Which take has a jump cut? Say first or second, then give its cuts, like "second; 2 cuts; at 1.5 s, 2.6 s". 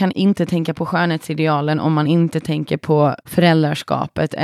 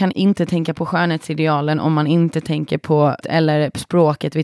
second; 1 cut; at 3.2 s